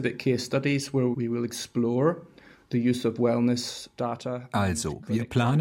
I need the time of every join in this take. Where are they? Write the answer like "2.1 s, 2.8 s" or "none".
1.1 s